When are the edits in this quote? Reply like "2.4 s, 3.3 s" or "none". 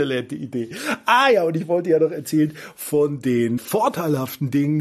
3.6 s